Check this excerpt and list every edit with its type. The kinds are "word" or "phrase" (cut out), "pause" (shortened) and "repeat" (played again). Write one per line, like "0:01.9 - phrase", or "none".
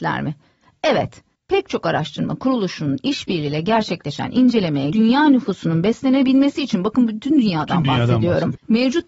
0:04.9 - word